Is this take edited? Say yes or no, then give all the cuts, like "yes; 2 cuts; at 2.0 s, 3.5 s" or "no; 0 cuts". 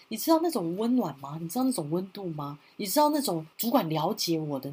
yes; 1 cut; at 3.5 s